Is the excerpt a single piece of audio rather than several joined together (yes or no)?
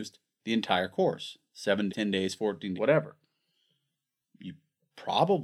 no